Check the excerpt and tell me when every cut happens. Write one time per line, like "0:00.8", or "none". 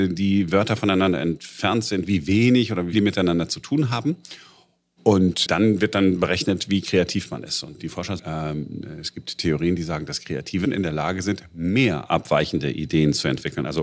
0:02.9
0:05.4
0:07.8
0:08.2
0:10.6